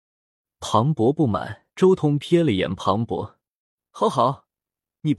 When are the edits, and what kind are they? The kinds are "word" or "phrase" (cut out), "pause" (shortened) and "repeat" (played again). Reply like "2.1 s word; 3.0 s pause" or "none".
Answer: 1.7 s pause